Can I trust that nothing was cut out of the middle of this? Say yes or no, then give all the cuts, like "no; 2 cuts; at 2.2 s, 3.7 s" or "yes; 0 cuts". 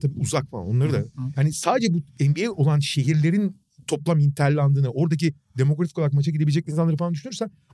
yes; 0 cuts